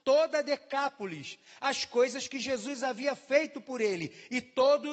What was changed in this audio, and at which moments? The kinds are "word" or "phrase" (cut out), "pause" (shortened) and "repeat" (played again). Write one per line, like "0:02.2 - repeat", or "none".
none